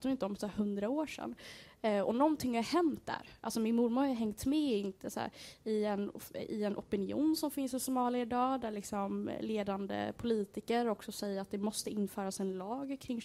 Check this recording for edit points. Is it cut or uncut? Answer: uncut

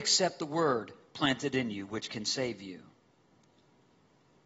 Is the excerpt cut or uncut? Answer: uncut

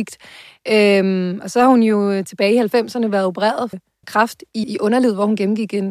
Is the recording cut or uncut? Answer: cut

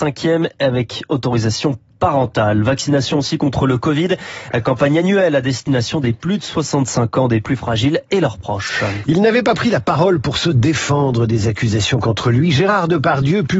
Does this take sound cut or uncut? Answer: uncut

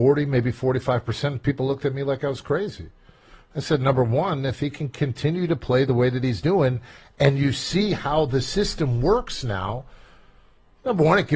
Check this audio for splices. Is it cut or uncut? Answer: uncut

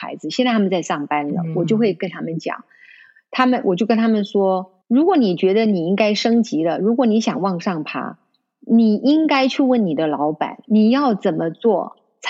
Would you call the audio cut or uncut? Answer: cut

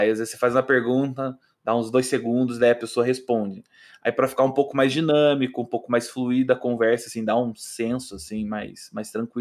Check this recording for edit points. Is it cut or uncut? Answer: uncut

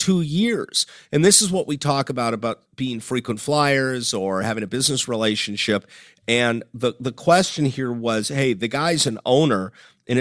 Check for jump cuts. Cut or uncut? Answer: uncut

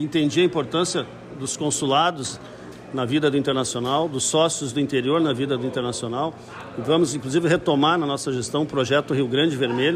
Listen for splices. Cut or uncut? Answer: uncut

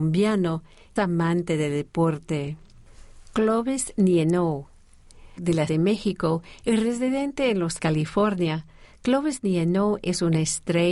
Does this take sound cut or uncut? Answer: cut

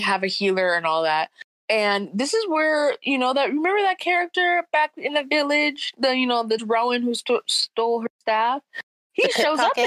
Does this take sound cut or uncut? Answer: cut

